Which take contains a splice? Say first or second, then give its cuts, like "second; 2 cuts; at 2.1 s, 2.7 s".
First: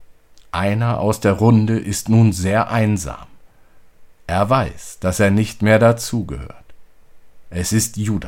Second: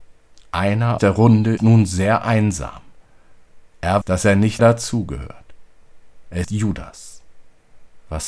second; 5 cuts; at 1.0 s, 1.6 s, 4.0 s, 4.6 s, 6.4 s